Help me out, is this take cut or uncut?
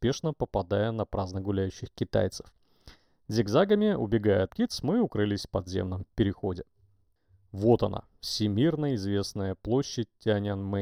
cut